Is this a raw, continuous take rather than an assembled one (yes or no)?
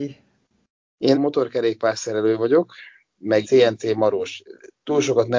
no